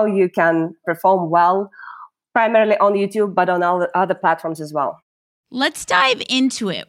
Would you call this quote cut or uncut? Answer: uncut